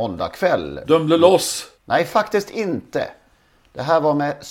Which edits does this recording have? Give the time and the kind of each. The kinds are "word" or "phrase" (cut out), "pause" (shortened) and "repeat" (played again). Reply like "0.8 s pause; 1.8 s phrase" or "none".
1.7 s pause